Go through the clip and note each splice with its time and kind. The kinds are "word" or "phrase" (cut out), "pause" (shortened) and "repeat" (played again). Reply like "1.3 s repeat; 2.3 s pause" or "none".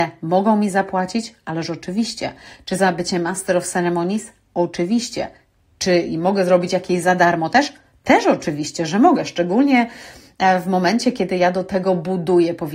none